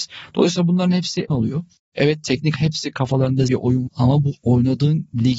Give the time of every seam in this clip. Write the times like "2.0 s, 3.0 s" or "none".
1.3 s, 2.5 s, 3.5 s, 3.9 s